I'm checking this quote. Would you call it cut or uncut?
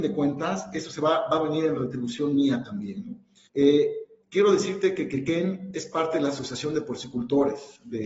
cut